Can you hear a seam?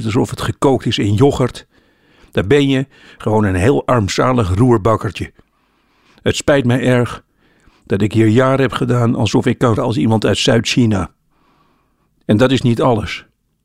yes; 1 cut; at 9.8 s

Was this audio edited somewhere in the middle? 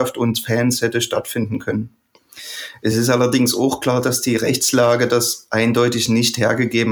no; 0 cuts

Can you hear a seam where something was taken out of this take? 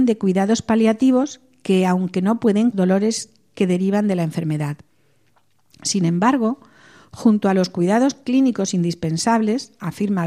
yes; 1 cut; at 2.7 s

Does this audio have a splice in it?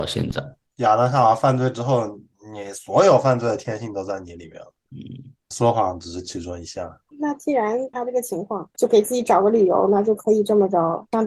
no; 0 cuts

